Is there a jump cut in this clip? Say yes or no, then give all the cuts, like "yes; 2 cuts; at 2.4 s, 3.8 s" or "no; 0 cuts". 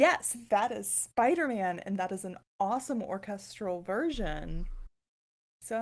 no; 0 cuts